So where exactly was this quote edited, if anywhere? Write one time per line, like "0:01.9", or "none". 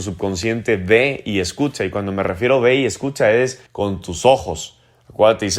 0:03.7